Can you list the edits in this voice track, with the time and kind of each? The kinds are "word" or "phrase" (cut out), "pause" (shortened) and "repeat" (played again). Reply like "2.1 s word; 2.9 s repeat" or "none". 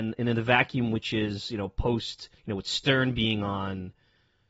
2.4 s pause